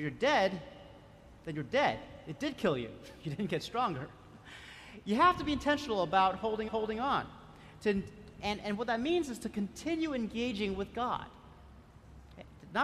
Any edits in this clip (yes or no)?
yes